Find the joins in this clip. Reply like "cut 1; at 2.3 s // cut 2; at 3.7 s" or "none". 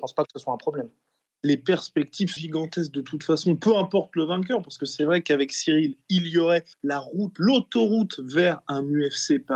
cut 1; at 2.4 s // cut 2; at 6.7 s